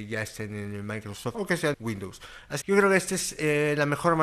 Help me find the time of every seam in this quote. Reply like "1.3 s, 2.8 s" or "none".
1.3 s, 1.7 s, 2.6 s